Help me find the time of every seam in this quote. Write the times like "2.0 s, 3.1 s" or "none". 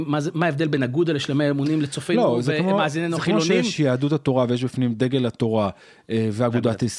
none